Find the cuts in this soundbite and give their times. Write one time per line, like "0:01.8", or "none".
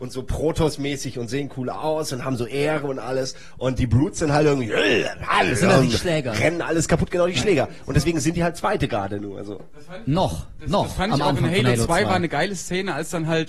none